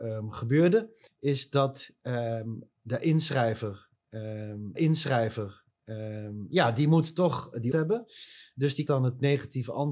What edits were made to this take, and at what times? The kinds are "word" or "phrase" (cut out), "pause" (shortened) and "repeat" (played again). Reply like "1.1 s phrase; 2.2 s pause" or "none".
1.1 s pause; 4.8 s repeat; 7.7 s word; 8.9 s word